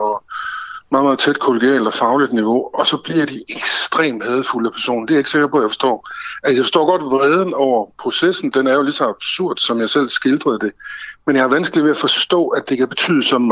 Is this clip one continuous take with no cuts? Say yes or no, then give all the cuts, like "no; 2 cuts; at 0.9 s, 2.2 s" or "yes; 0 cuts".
yes; 0 cuts